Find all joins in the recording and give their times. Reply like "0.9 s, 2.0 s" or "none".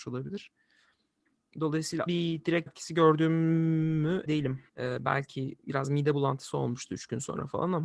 2.1 s, 2.7 s, 4.3 s, 4.7 s